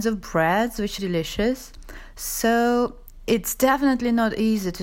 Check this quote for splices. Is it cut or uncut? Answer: cut